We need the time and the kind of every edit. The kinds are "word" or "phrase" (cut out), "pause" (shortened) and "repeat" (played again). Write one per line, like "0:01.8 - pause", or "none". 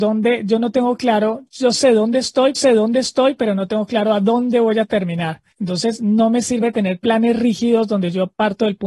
0:02.5 - repeat
0:05.5 - pause

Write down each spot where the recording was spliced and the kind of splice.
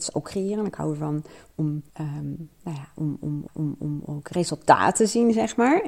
0:01.9 - pause
0:03.5 - repeat

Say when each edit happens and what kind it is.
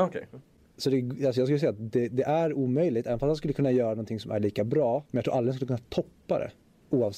0:05.1 - pause

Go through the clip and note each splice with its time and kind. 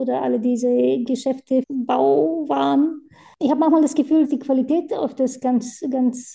0:01.1 - word
0:01.6 - word
0:04.2 - word

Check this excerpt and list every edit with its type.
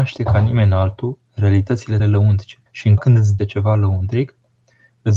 0:02.0 - word
0:02.7 - pause
0:03.0 - word
0:03.4 - word

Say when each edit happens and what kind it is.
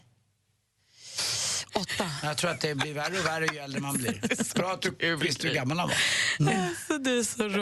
none

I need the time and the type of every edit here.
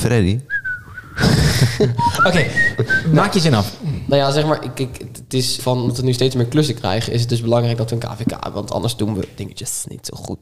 0:05.6 - word

